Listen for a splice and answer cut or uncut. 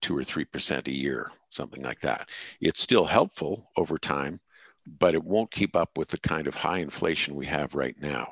uncut